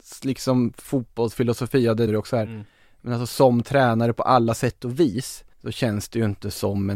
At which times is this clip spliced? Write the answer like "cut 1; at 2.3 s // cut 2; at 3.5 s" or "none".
cut 1; at 2.1 s // cut 2; at 5.5 s